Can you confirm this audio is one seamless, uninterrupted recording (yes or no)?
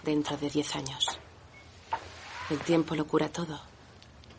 yes